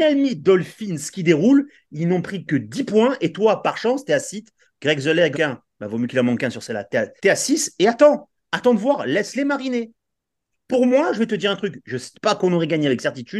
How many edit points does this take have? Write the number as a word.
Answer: three